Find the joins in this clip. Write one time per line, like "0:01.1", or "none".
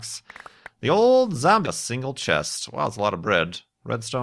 0:01.6